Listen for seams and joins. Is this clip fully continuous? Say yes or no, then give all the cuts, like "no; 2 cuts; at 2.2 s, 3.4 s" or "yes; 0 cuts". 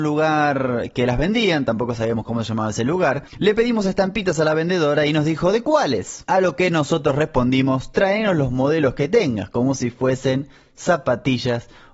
yes; 0 cuts